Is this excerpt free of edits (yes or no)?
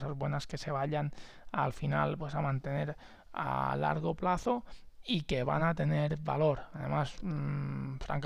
yes